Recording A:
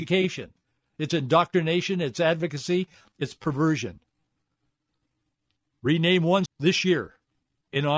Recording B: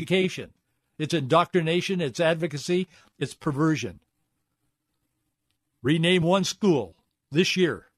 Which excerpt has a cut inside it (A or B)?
A